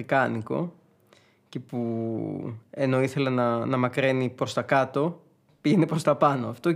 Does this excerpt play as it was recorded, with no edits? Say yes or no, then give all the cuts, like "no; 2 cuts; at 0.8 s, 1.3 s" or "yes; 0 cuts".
yes; 0 cuts